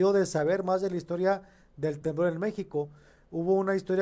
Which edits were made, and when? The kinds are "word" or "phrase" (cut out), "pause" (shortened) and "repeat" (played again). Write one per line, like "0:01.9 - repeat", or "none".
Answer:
none